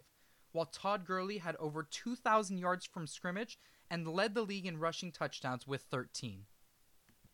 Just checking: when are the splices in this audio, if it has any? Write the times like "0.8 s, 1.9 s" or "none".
none